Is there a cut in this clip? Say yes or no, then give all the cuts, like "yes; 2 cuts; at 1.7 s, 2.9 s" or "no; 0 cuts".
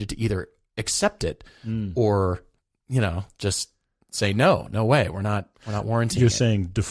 no; 0 cuts